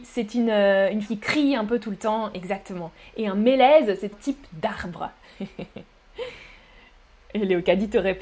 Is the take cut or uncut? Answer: cut